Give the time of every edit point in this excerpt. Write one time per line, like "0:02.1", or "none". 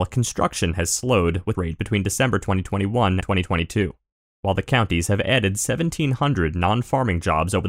0:01.5
0:03.2